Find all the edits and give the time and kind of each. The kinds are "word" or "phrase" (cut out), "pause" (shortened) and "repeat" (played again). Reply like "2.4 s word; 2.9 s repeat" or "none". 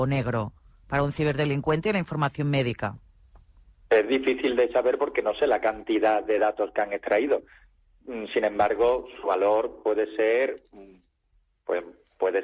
none